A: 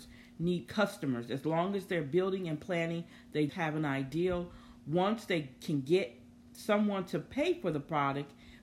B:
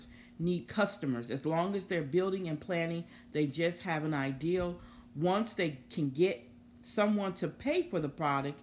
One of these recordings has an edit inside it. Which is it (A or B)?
A